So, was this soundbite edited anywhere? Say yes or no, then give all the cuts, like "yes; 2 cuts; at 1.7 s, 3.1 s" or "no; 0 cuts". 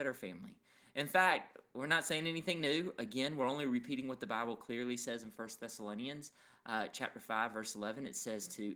no; 0 cuts